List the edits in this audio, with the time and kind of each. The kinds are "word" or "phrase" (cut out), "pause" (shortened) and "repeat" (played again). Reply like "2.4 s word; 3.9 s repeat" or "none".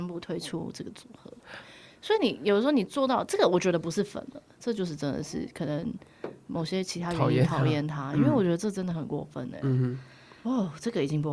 none